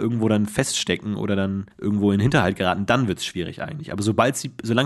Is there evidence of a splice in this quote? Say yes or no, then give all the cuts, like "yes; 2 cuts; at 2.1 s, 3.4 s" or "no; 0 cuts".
yes; 1 cut; at 1.7 s